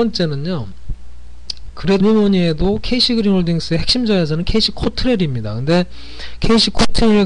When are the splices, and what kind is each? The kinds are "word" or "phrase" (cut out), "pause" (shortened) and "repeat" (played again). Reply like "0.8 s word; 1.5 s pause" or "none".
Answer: 2.0 s word